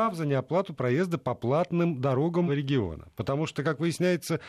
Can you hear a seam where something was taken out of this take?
yes; 1 cut; at 2.5 s

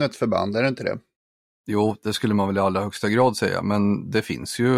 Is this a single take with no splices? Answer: yes; 0 cuts

